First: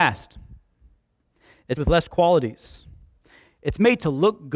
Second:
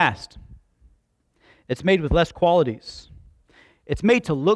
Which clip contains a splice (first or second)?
first